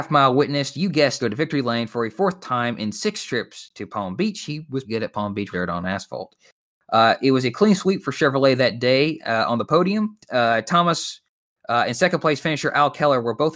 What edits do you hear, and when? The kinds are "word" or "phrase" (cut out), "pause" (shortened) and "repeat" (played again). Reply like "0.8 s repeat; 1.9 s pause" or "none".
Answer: 1.2 s phrase; 4.8 s word; 5.5 s phrase; 10.2 s pause

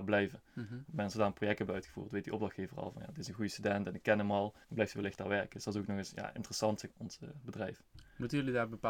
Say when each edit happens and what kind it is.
4.6 s pause; 6.9 s word

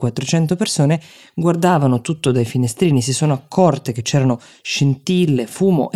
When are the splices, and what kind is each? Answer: none

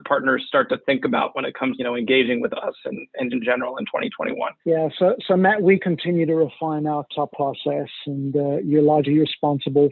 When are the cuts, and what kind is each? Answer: 1.8 s phrase; 3.3 s word; 4.6 s pause; 7.3 s phrase

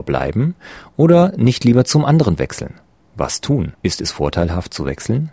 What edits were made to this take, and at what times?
3.0 s pause; 3.7 s pause

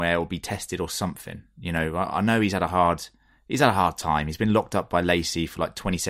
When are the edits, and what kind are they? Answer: none

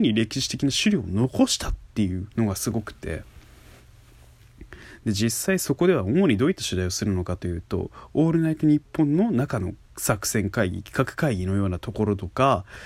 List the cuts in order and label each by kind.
2.3 s pause; 9.8 s pause

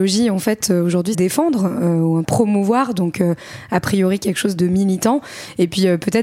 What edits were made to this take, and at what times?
1.1 s phrase; 2.2 s phrase; 4.6 s word

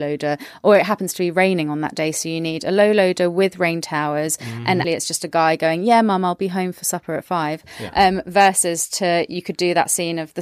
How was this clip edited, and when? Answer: 4.8 s word

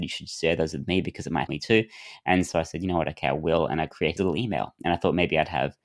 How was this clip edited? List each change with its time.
1.5 s word; 4.2 s word

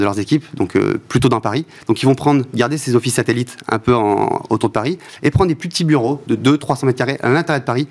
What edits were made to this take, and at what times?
none

